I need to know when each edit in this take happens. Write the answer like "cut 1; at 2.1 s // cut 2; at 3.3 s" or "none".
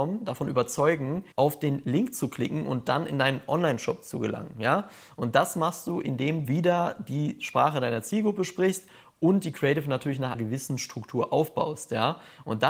cut 1; at 1.3 s // cut 2; at 6.4 s // cut 3; at 10.3 s